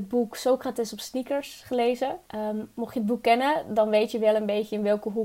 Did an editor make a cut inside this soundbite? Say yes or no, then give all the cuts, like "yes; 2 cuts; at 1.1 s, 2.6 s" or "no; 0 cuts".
yes; 1 cut; at 2.3 s